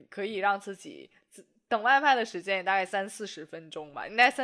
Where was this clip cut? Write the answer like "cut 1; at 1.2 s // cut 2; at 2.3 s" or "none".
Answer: none